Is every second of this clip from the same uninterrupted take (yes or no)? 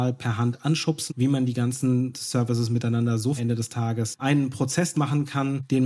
no